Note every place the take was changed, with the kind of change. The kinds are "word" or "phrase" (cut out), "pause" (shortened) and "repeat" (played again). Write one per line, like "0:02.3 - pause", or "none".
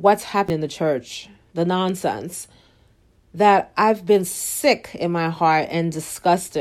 none